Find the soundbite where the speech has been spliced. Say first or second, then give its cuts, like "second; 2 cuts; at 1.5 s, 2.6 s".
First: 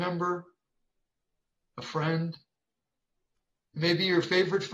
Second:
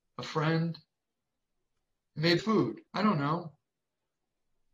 second; 2 cuts; at 2.4 s, 2.9 s